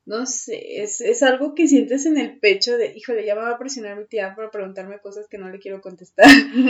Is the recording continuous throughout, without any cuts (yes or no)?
yes